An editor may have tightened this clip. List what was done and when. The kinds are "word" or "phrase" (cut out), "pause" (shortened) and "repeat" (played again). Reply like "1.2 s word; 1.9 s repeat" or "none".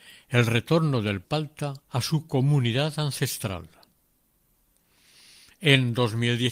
1.2 s word; 1.8 s pause